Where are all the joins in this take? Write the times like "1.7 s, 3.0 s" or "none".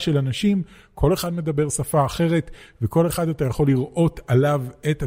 none